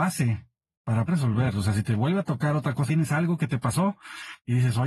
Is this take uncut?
no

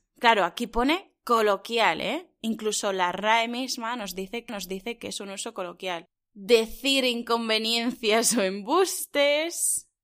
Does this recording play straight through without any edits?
no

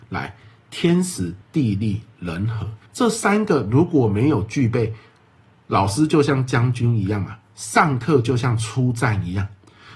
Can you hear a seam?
yes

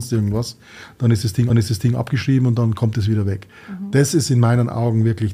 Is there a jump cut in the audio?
yes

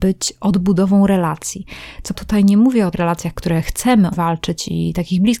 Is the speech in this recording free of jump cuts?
no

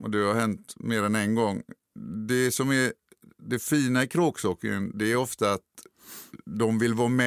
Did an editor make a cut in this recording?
no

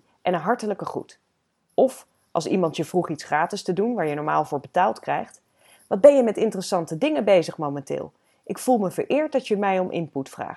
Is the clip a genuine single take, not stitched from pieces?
yes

